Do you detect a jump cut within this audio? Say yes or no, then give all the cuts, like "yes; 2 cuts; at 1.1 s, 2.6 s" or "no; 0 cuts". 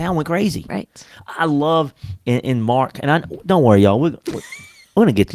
no; 0 cuts